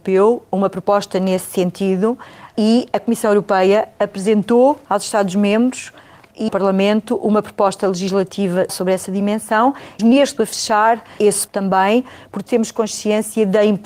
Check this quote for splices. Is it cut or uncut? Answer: cut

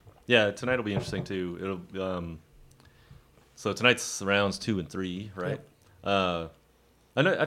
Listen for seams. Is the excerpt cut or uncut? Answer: uncut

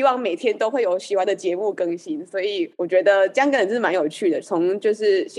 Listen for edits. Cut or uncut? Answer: cut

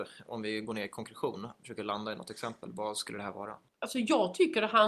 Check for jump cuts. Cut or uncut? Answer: uncut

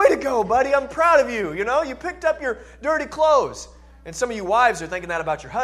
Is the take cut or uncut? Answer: uncut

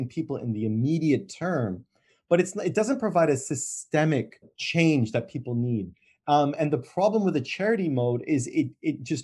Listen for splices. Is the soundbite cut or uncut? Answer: uncut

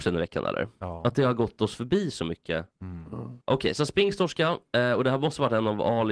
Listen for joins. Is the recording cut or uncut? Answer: cut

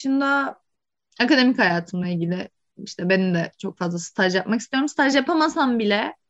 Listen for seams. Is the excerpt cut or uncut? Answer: uncut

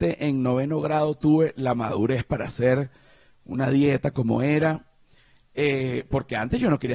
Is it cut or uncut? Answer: uncut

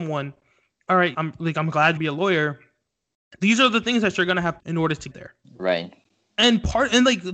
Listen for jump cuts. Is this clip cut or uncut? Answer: cut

